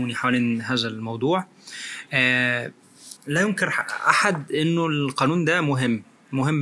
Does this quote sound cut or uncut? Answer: cut